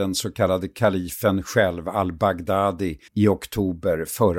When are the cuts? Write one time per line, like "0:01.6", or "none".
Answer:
0:03.1